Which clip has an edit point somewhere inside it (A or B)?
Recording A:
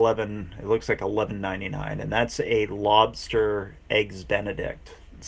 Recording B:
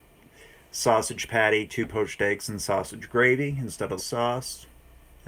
B